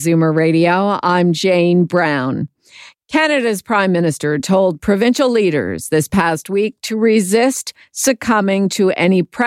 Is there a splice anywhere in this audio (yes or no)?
no